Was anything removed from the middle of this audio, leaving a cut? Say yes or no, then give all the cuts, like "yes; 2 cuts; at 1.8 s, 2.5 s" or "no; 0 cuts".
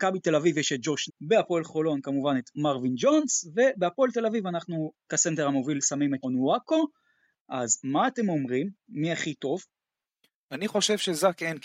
yes; 2 cuts; at 1.1 s, 6.2 s